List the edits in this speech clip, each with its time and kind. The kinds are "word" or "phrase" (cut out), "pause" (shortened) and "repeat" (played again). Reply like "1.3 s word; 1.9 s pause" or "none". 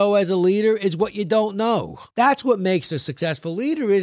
2.1 s pause